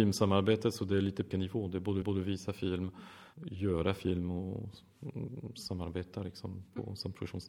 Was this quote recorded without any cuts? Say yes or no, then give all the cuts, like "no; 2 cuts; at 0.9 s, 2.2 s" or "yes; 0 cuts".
no; 3 cuts; at 1.3 s, 2.0 s, 3.3 s